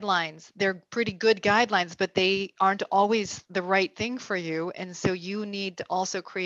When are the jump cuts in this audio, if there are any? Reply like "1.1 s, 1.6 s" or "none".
none